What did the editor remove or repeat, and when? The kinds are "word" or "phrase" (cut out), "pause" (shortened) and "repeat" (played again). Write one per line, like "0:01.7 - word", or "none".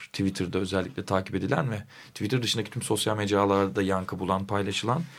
none